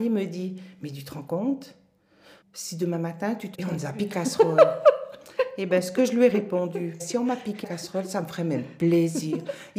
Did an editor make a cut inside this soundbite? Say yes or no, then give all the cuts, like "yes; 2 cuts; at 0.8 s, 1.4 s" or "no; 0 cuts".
yes; 5 cuts; at 2.4 s, 3.5 s, 4.1 s, 7.0 s, 7.6 s